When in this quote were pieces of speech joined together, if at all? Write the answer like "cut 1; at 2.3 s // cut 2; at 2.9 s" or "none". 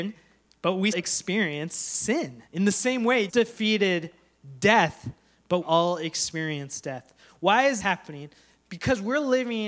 cut 1; at 0.9 s // cut 2; at 2.5 s // cut 3; at 3.3 s // cut 4; at 5.6 s // cut 5; at 7.8 s

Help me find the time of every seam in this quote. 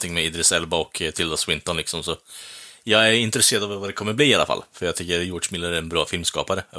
none

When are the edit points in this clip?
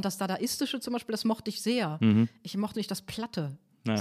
cut 1; at 2.7 s

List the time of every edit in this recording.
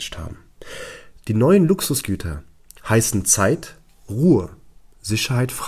none

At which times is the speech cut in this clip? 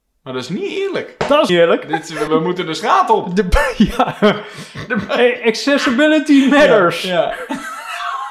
cut 1; at 1.5 s // cut 2; at 2.3 s

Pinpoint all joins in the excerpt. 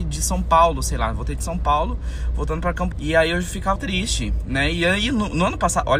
cut 1; at 2.9 s // cut 2; at 3.8 s

